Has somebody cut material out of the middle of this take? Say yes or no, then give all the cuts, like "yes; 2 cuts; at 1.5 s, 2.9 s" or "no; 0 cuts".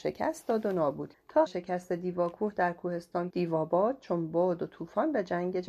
yes; 3 cuts; at 1.1 s, 1.5 s, 3.3 s